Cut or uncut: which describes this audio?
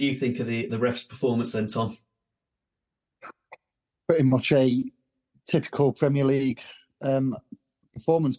uncut